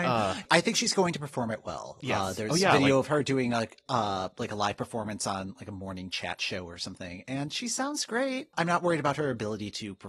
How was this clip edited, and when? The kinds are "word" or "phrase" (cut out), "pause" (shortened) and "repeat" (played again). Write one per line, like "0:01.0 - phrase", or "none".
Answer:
none